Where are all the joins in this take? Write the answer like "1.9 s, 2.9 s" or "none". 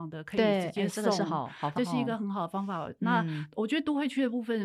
1.8 s